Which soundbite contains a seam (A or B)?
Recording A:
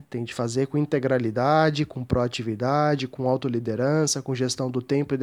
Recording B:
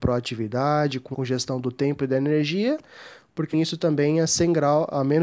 B